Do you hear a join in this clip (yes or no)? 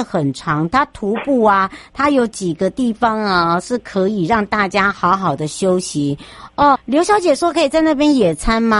yes